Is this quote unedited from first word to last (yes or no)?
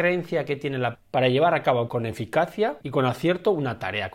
no